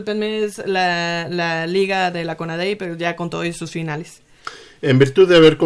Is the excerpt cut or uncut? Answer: uncut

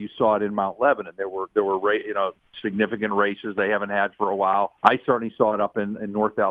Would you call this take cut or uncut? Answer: cut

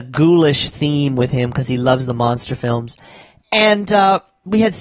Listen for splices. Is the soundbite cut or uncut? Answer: uncut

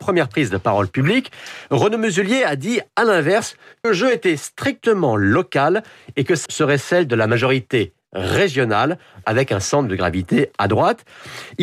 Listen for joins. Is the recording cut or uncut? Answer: cut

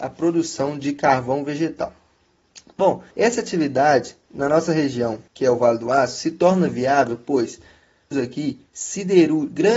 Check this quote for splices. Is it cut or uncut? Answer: cut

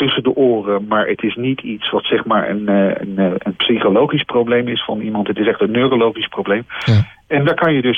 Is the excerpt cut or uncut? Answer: uncut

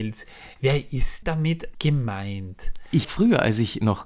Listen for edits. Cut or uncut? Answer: cut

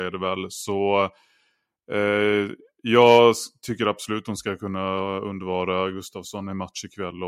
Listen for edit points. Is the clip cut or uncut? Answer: uncut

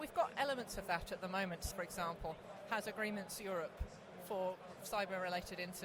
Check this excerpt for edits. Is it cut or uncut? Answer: cut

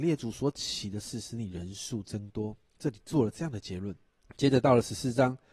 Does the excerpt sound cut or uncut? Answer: cut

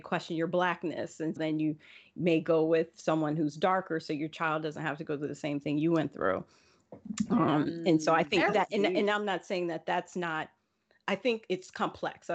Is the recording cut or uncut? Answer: cut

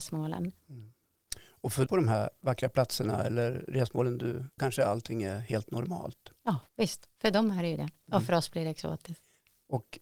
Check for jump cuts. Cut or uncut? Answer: cut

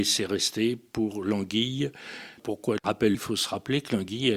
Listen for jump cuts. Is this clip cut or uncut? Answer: cut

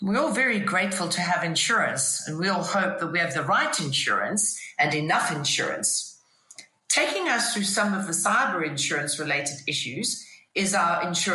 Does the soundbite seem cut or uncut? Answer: uncut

